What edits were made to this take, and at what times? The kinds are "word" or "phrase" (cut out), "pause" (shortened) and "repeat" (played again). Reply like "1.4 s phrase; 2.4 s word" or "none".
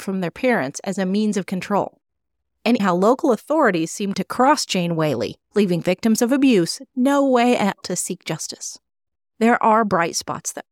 2.8 s word; 4.1 s word; 7.8 s word